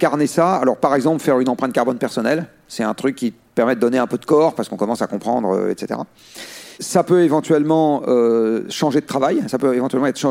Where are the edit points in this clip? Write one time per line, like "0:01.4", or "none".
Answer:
0:06.8